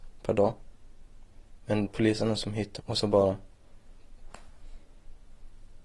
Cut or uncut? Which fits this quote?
cut